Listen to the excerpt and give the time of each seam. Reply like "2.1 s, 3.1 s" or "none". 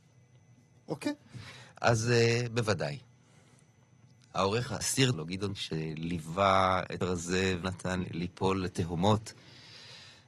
4.8 s, 5.1 s, 5.5 s, 7.0 s, 7.6 s, 8.0 s

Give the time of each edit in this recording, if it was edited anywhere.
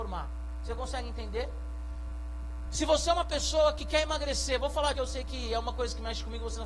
4.9 s

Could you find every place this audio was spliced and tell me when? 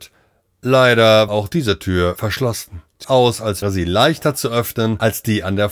1.3 s, 3.0 s, 3.6 s

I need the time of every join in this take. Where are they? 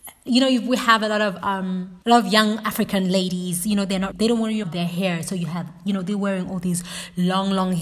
2.0 s, 4.1 s, 4.6 s

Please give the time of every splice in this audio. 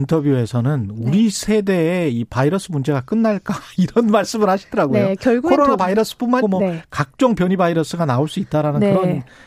6.4 s

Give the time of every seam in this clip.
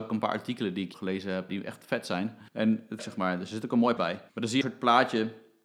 0.9 s, 1.5 s, 2.5 s, 3.0 s, 4.0 s, 4.3 s, 4.6 s

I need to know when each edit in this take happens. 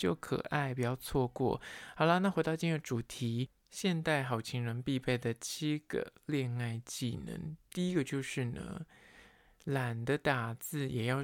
none

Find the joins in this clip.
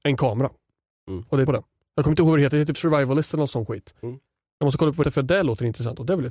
1.5 s, 2.7 s, 5.0 s

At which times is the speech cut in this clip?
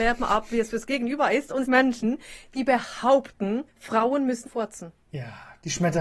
1.6 s, 3.7 s, 4.5 s, 5.0 s

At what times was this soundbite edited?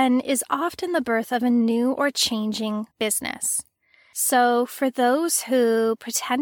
2.9 s

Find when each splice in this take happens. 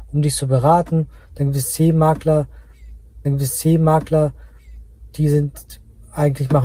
3.2 s

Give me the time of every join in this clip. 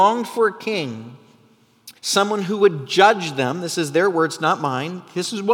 2.0 s

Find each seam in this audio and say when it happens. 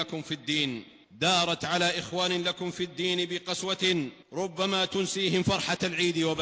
1.0 s, 4.2 s

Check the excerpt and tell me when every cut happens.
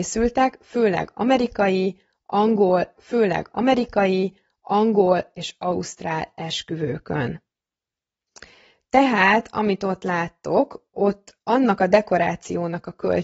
3.0 s

